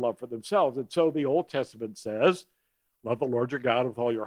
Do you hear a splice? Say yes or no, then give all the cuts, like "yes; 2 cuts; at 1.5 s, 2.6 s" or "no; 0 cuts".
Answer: no; 0 cuts